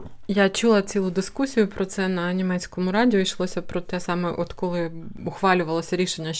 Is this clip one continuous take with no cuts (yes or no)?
yes